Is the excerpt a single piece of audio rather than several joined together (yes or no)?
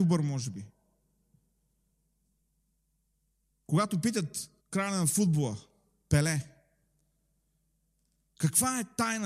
no